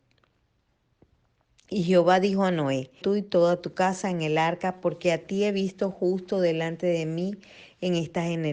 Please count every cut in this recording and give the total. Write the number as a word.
one